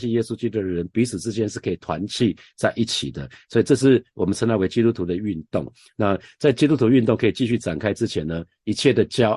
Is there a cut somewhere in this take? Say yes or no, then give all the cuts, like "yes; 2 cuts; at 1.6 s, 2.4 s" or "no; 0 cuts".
no; 0 cuts